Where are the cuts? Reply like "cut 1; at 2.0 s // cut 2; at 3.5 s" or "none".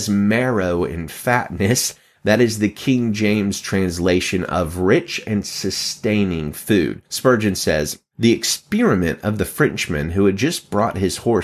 cut 1; at 7.1 s